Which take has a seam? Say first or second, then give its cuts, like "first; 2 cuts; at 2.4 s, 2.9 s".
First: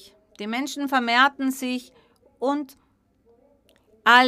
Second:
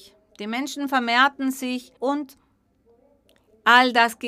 second; 1 cut; at 2.0 s